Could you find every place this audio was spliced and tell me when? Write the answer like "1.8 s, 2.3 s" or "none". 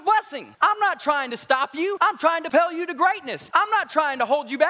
none